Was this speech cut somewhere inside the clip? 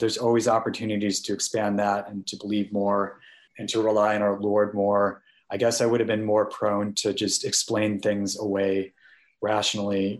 no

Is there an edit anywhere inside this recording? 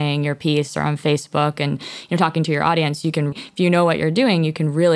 yes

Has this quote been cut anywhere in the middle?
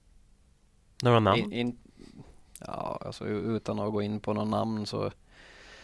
no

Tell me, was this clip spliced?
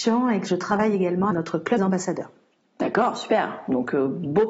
yes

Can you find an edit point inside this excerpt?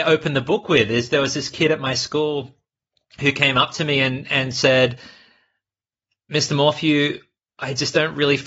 no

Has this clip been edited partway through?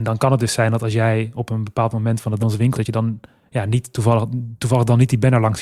yes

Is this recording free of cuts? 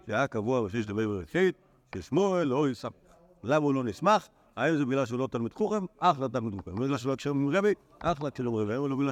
yes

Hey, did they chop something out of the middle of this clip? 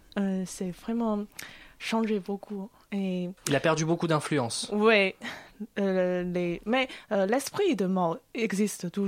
no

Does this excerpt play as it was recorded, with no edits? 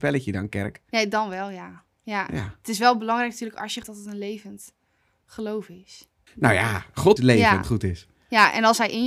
no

